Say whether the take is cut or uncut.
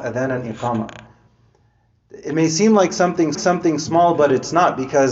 cut